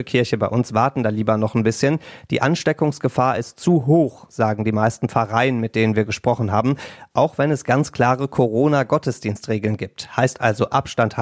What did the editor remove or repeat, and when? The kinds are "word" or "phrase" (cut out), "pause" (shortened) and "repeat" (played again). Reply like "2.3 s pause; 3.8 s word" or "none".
none